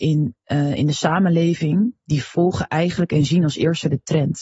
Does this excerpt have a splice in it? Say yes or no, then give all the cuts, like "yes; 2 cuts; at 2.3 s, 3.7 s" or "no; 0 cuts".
no; 0 cuts